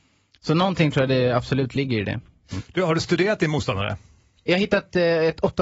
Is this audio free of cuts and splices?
yes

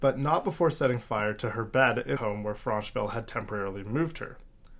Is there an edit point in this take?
yes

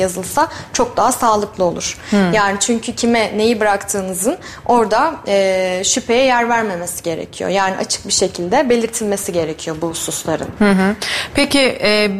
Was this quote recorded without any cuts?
yes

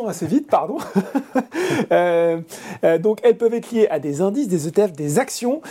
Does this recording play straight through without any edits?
yes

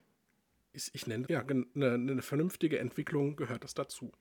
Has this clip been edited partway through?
yes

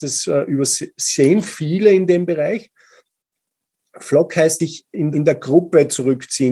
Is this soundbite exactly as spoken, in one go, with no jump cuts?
no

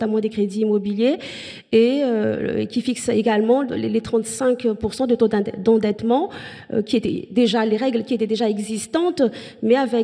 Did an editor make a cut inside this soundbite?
no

